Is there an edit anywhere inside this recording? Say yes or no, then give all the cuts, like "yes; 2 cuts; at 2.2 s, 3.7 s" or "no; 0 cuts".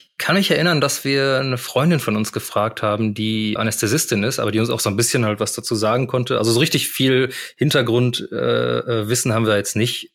yes; 1 cut; at 3.6 s